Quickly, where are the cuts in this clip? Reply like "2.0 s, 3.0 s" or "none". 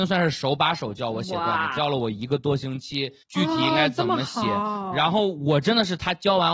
3.2 s